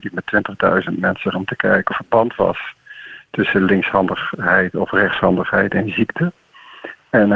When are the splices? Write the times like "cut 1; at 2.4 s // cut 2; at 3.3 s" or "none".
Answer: cut 1; at 1.3 s // cut 2; at 1.9 s